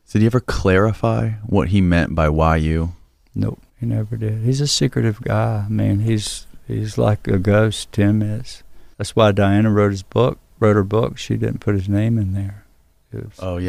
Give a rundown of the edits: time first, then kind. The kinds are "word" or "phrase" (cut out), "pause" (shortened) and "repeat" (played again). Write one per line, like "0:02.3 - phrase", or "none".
0:03.7 - pause
0:08.9 - pause